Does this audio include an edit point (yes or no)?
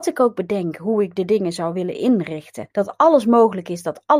yes